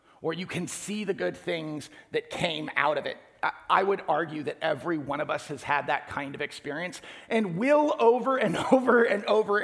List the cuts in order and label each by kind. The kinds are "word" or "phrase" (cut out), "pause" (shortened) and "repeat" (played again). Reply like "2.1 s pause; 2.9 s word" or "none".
none